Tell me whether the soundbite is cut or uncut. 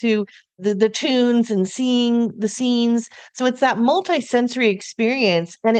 uncut